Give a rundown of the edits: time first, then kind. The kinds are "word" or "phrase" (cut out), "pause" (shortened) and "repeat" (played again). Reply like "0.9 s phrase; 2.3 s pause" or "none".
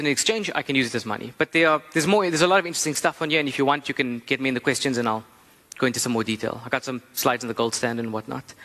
none